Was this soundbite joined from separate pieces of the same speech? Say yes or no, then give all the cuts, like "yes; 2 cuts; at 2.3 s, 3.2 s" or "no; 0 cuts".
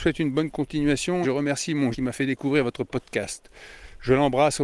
yes; 2 cuts; at 1.2 s, 1.9 s